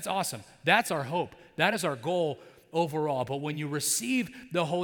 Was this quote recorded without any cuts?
yes; 0 cuts

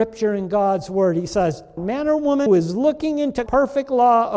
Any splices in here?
yes; 3 cuts; at 1.8 s, 2.5 s, 3.5 s

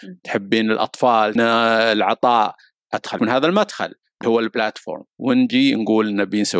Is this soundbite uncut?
no; 4 cuts; at 1.4 s, 3.2 s, 4.2 s, 5.1 s

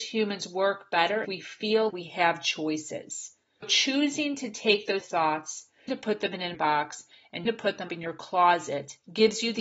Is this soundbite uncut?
no; 8 cuts; at 1.2 s, 1.9 s, 3.6 s, 5.0 s, 5.9 s, 6.5 s, 7.5 s, 7.9 s

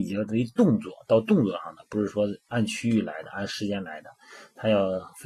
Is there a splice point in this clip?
no; 0 cuts

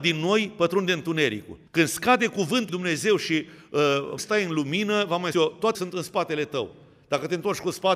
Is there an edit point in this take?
yes; 5 cuts; at 1.7 s, 2.7 s, 4.2 s, 5.3 s, 5.7 s

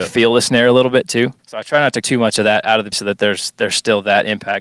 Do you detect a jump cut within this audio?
yes; 3 cuts; at 1.4 s, 2.0 s, 2.9 s

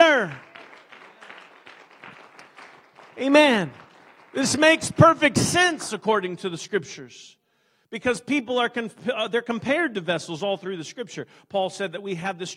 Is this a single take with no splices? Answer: yes; 0 cuts

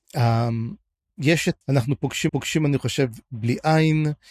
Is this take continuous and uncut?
no; 3 cuts; at 1.6 s, 2.3 s, 3.3 s

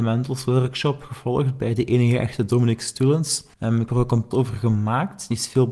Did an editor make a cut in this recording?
yes; 3 cuts; at 3.5 s, 3.9 s, 4.3 s

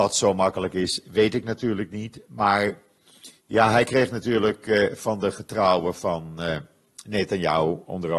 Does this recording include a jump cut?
yes; 1 cut; at 3.4 s

